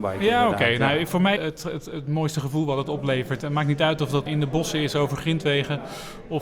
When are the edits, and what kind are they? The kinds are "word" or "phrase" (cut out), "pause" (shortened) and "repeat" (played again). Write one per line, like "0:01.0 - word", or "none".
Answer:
0:01.4 - phrase
0:04.3 - word